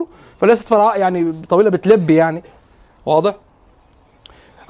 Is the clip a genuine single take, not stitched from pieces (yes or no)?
yes